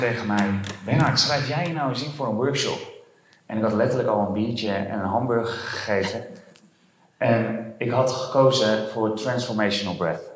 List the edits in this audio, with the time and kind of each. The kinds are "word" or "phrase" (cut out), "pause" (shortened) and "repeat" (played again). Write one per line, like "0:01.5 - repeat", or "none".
none